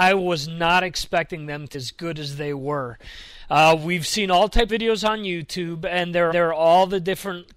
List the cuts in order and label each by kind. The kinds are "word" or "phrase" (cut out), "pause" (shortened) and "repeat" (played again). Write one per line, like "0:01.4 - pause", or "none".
0:01.7 - word
0:04.7 - word
0:06.3 - repeat